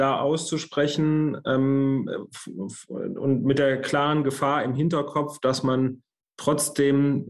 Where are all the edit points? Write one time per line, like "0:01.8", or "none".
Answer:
none